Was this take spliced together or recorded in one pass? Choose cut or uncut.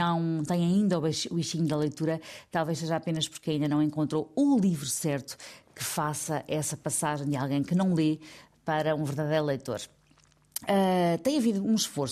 uncut